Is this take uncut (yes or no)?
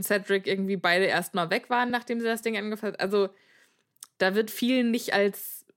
yes